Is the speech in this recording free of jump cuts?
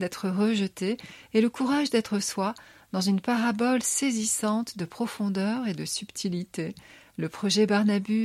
yes; 0 cuts

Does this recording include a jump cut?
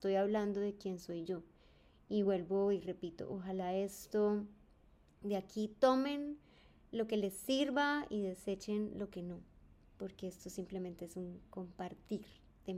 no; 0 cuts

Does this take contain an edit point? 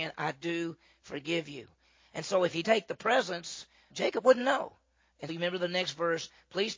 yes; 3 cuts; at 2.6 s, 3.9 s, 5.3 s

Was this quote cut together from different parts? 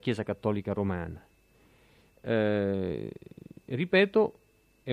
no; 0 cuts

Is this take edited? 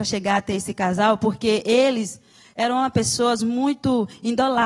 no; 0 cuts

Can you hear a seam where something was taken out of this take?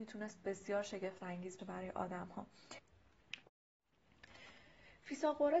yes; 1 cut; at 1.6 s

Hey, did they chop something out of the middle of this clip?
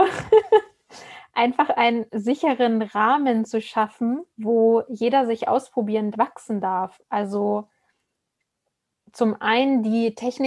yes; 2 cuts; at 4.3 s, 6.1 s

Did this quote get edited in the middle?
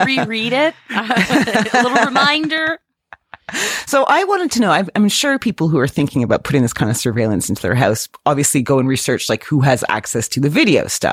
no; 0 cuts

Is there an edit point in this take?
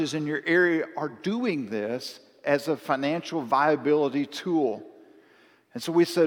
no; 0 cuts

